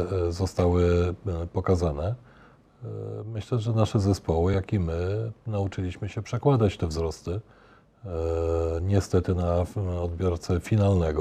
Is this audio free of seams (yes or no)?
yes